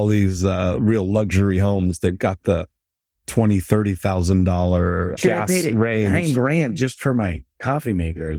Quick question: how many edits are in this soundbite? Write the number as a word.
zero